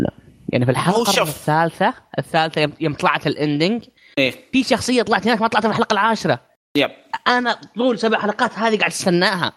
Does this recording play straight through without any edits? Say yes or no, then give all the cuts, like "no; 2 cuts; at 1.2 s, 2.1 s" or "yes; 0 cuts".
yes; 0 cuts